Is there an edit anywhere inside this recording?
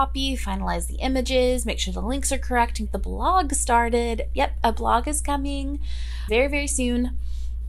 yes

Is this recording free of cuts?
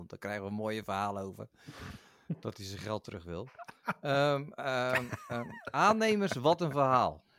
yes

